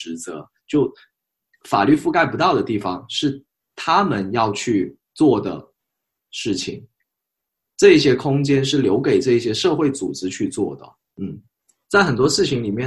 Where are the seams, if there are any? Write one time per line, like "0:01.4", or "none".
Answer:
none